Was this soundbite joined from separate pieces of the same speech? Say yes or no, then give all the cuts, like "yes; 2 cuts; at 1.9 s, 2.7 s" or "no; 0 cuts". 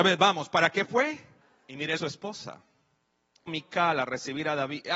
yes; 3 cuts; at 1.4 s, 2.0 s, 3.5 s